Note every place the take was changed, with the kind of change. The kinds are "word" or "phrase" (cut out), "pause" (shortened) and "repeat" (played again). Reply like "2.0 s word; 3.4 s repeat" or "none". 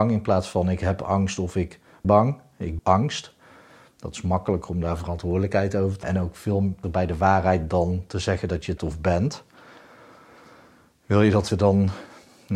2.0 s word; 2.8 s word; 6.0 s word; 6.8 s word; 8.8 s word; 11.5 s word